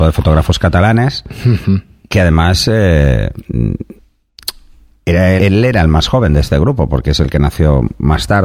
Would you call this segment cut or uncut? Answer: cut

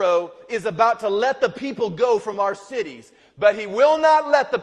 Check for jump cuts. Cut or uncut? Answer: uncut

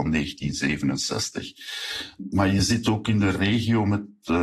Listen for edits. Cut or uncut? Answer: uncut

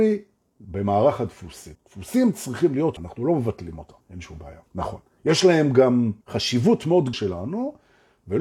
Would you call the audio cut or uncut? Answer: cut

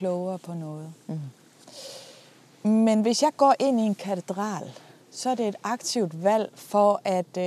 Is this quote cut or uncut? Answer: uncut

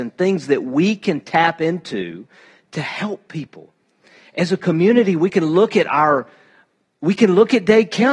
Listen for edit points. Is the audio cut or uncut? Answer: uncut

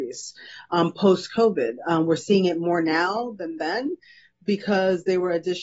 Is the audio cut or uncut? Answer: uncut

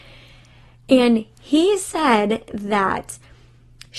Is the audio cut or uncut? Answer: uncut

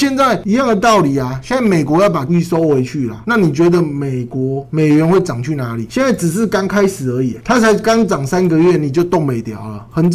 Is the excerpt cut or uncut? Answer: cut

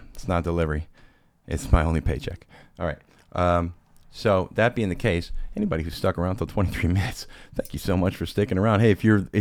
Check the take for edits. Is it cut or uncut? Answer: uncut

